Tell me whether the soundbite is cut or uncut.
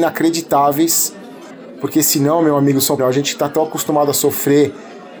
cut